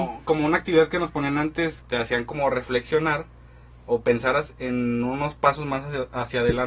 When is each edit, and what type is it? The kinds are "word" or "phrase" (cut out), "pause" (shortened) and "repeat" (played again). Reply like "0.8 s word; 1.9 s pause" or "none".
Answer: 1.8 s word